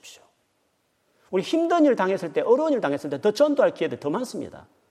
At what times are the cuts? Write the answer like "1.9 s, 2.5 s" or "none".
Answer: none